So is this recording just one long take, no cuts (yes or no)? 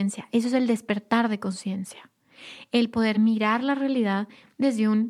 yes